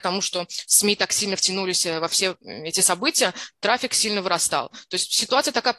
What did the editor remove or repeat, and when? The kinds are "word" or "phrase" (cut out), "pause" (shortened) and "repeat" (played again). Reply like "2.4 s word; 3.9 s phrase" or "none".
none